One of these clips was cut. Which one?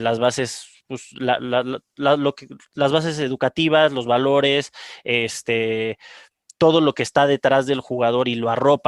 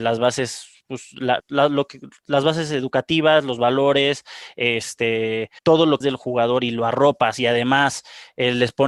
second; 3 cuts; at 1.4 s, 5.6 s, 6.0 s

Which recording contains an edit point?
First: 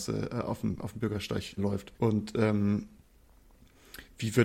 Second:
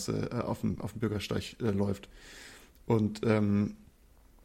first; 2 cuts; at 1.6 s, 2.0 s

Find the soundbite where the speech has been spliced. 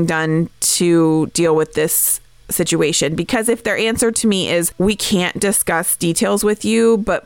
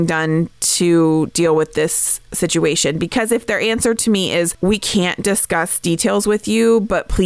second; 1 cut; at 2.2 s

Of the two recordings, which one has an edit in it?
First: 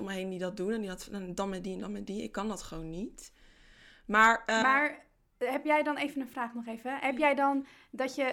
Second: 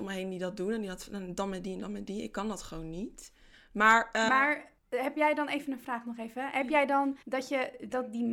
second; 3 cuts; at 3.5 s, 4.8 s, 7.2 s

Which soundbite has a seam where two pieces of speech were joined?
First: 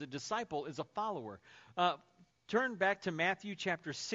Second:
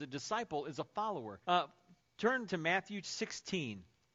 second; 3 cuts; at 1.4 s, 2.5 s, 3.0 s

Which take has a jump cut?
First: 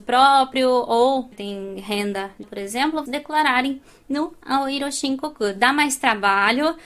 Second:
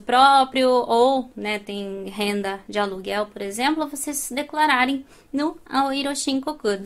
first; 3 cuts; at 1.3 s, 2.4 s, 3.1 s

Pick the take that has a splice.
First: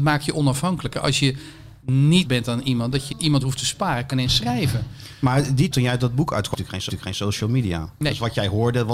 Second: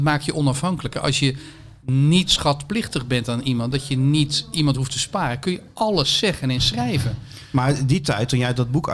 first; 6 cuts; at 2.2 s, 3.1 s, 4.1 s, 5.7 s, 6.5 s, 6.9 s

